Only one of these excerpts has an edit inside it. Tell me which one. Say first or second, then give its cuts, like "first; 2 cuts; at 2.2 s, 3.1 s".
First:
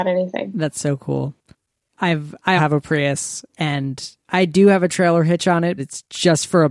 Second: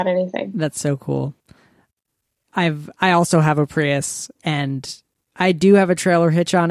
first; 4 cuts; at 1.5 s, 2.6 s, 4.2 s, 5.8 s